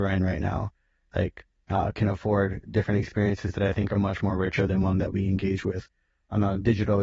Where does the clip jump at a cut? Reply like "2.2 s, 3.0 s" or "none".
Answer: none